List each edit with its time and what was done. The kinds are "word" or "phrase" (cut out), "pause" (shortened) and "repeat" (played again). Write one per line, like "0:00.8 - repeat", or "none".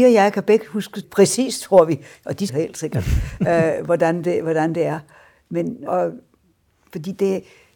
0:01.0 - word
0:02.5 - word
0:05.9 - word